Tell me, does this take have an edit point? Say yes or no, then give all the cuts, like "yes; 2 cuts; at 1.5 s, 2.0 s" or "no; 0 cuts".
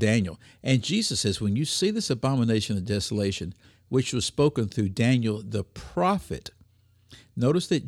no; 0 cuts